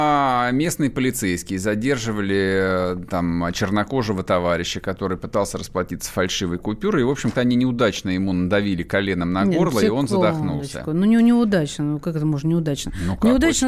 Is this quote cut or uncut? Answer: cut